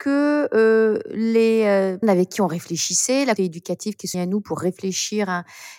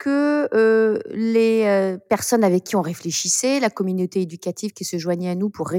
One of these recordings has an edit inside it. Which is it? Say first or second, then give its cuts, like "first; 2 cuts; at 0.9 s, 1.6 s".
first; 3 cuts; at 2.0 s, 3.4 s, 4.1 s